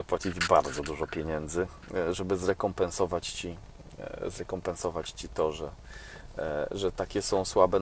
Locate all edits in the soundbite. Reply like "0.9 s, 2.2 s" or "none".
none